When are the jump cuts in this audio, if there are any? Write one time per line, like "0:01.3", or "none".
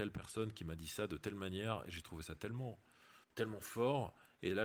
0:03.2